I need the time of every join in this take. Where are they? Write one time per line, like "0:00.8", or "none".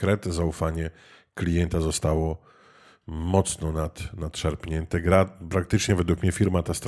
none